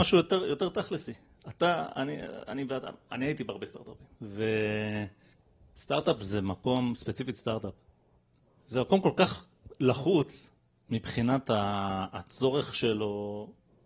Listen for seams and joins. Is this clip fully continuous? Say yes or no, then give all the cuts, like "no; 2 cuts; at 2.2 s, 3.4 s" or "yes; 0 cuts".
no; 1 cut; at 4.1 s